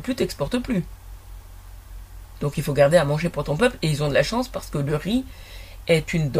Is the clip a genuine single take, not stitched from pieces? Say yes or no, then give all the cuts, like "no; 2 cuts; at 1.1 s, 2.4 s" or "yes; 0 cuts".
yes; 0 cuts